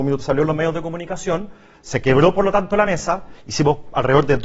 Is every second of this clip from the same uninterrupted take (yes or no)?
yes